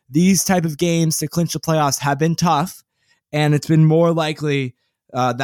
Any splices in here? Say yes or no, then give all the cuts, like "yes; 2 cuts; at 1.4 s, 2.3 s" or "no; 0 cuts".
no; 0 cuts